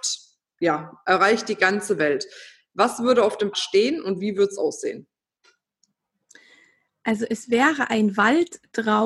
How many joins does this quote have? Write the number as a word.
one